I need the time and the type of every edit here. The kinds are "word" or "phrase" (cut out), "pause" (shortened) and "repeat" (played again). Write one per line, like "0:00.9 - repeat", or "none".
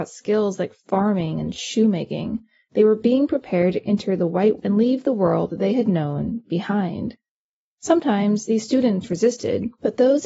0:04.6 - word